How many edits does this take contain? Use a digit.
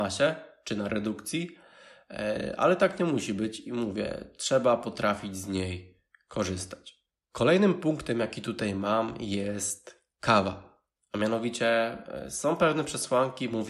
0